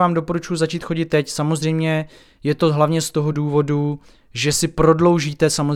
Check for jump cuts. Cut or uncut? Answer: uncut